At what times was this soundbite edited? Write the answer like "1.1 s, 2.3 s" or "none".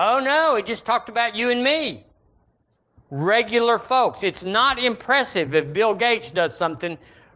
none

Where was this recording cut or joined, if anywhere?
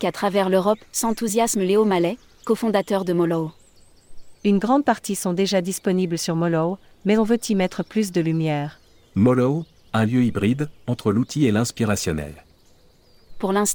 none

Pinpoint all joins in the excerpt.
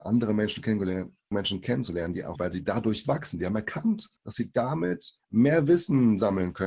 1.3 s, 2.4 s, 3.0 s, 4.2 s, 5.2 s

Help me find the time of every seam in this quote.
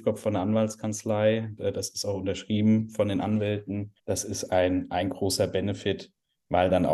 1.6 s, 4.0 s

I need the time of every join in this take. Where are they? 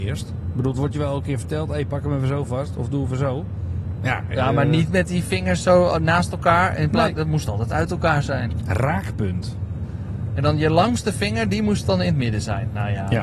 none

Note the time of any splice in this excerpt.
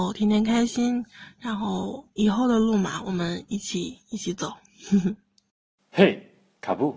2.1 s

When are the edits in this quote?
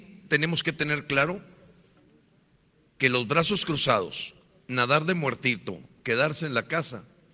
none

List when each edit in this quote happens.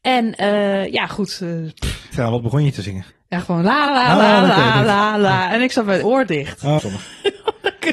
2.1 s, 3.1 s, 3.9 s, 6.0 s, 6.8 s

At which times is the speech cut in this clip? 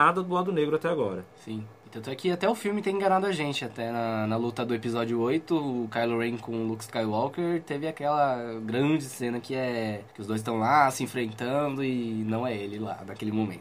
10.1 s

